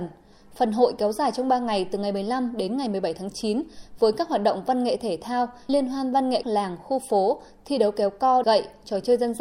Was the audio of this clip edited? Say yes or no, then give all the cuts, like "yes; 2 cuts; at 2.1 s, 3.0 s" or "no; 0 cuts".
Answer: yes; 3 cuts; at 5.7 s, 6.4 s, 8.4 s